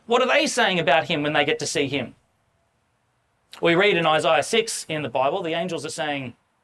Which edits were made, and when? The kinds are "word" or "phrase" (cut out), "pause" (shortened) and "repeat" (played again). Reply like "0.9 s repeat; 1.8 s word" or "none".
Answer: none